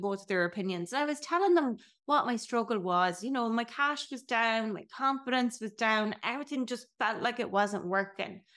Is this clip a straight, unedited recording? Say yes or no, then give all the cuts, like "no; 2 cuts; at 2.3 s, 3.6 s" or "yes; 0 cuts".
yes; 0 cuts